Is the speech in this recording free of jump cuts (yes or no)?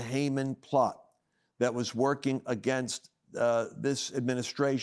yes